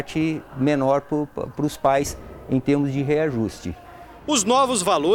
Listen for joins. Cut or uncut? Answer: uncut